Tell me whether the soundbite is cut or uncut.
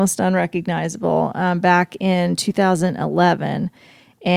uncut